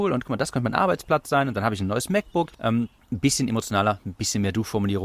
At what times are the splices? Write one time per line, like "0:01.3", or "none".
none